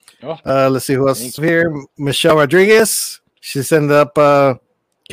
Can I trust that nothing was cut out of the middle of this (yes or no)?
no